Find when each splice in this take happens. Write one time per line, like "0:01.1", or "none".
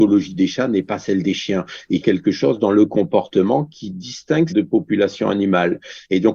0:02.0
0:04.5